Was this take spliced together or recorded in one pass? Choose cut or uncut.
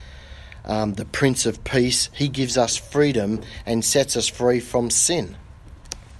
uncut